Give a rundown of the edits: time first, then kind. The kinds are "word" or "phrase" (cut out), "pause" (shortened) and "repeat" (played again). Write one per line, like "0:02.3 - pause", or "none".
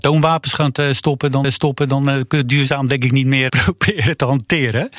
0:01.4 - repeat
0:02.4 - word
0:03.5 - word